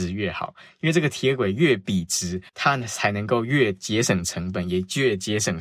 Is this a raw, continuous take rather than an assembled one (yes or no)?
no